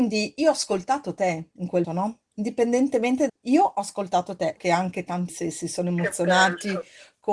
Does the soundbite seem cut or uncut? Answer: cut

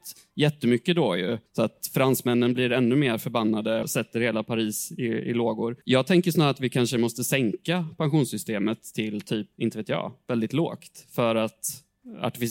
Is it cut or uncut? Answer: cut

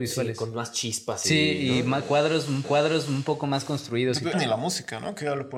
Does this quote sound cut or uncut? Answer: cut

